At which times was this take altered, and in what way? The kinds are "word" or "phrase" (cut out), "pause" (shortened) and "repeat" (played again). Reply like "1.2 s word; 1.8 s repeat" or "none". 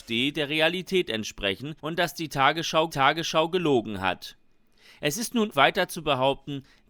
1.8 s pause; 2.9 s repeat; 5.5 s word